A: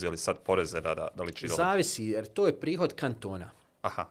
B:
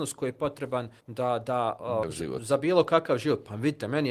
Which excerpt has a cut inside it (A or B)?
B